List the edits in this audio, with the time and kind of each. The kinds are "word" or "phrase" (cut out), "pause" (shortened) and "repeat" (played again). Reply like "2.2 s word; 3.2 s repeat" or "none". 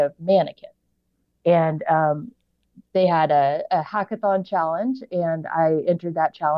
2.9 s pause